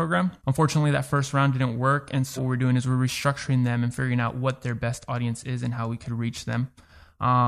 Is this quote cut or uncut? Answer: cut